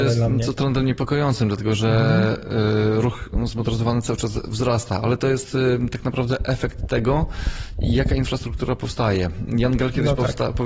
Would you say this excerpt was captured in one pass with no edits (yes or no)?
yes